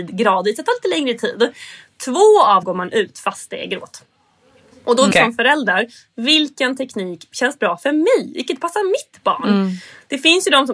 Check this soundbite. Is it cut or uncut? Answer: cut